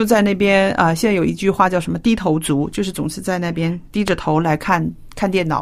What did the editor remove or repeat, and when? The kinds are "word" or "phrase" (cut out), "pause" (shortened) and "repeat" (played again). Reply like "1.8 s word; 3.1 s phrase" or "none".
none

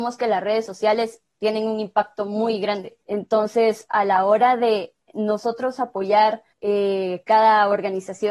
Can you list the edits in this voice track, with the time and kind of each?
3.0 s pause; 5.0 s pause; 6.5 s pause

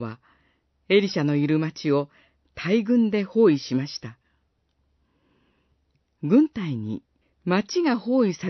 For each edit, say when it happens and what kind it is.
7.2 s pause

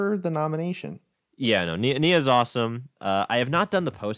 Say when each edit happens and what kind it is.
1.1 s pause

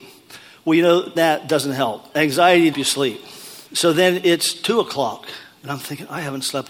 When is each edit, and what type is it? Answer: 1.2 s word; 2.7 s phrase; 3.7 s pause

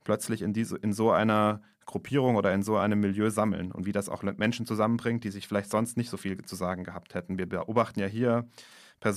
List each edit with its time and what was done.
none

